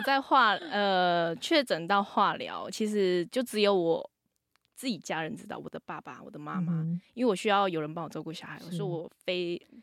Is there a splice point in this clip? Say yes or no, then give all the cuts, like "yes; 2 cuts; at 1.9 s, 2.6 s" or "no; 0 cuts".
no; 0 cuts